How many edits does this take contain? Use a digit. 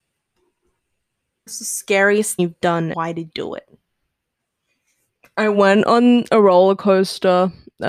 4